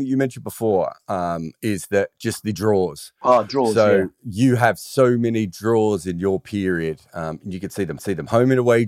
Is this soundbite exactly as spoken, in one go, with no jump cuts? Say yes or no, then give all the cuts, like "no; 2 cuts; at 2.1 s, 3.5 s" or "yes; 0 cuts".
no; 1 cut; at 8.0 s